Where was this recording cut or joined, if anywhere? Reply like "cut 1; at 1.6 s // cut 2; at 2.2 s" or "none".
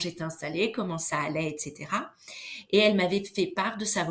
none